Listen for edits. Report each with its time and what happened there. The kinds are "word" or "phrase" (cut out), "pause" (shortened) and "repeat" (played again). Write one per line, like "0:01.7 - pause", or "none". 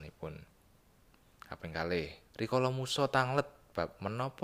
0:02.2 - pause